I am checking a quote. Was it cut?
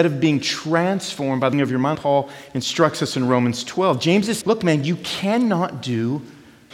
yes; 3 cuts; at 1.5 s, 1.9 s, 4.4 s

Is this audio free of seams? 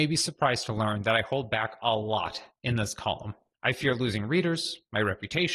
yes; 0 cuts

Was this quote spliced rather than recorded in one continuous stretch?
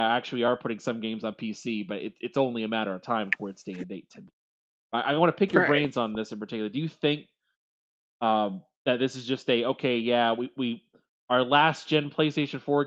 yes; 1 cut; at 8.7 s

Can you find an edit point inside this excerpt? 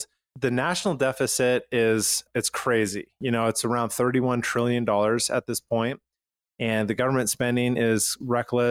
no; 0 cuts

